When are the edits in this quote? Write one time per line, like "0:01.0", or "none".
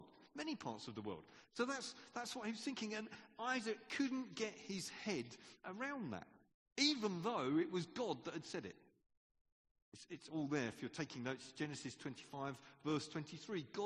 none